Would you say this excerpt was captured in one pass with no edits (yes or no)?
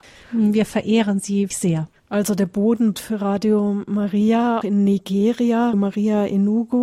no